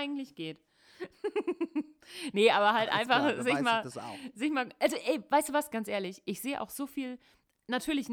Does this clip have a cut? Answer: no; 0 cuts

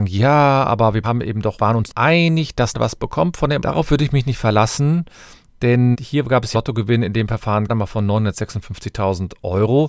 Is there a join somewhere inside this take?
yes; 8 cuts; at 1.0 s, 1.6 s, 1.9 s, 2.7 s, 3.6 s, 5.9 s, 6.5 s, 7.7 s

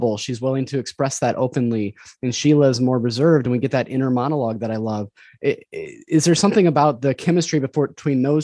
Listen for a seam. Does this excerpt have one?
no; 0 cuts

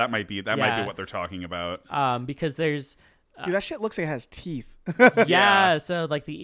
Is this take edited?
no; 0 cuts

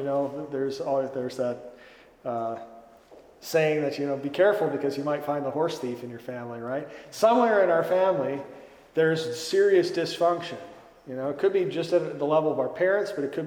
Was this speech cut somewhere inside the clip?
no; 0 cuts

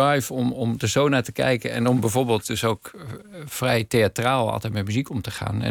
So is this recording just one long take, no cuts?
yes; 0 cuts

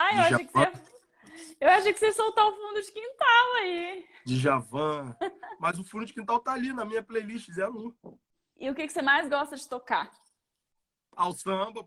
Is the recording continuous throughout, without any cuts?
yes; 0 cuts

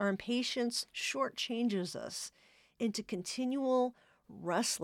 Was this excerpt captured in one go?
yes; 0 cuts

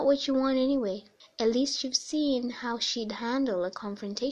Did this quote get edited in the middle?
yes; 1 cut; at 1.2 s

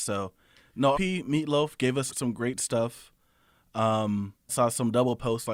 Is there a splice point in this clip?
yes; 3 cuts; at 0.9 s, 2.1 s, 4.5 s

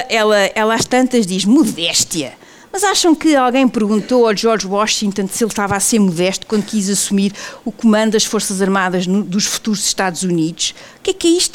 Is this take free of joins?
yes; 0 cuts

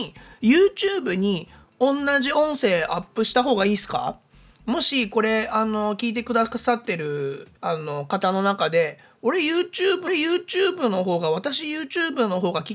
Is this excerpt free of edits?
no; 2 cuts; at 7.6 s, 10.1 s

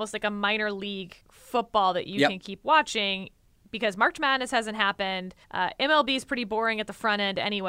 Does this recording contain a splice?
yes; 2 cuts; at 1.2 s, 5.4 s

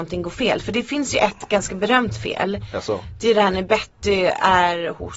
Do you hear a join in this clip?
no; 0 cuts

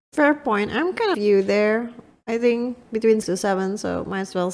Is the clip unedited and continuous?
no; 2 cuts; at 1.1 s, 3.2 s

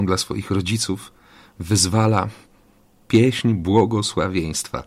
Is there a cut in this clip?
no; 0 cuts

